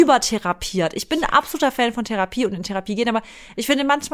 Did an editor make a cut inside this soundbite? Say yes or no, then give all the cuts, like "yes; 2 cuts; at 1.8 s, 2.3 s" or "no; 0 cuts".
no; 0 cuts